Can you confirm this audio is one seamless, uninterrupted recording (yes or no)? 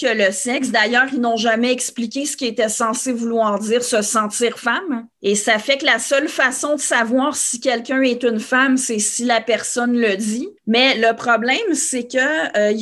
no